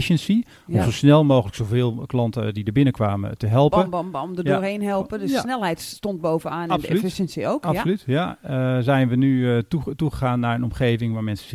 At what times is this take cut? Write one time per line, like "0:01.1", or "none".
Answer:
none